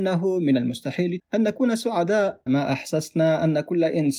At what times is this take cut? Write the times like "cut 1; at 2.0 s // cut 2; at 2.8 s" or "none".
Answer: cut 1; at 1.2 s // cut 2; at 2.5 s